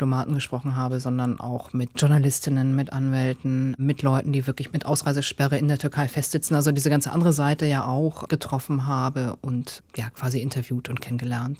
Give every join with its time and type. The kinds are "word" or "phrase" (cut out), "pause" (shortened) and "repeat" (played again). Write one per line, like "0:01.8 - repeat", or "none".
none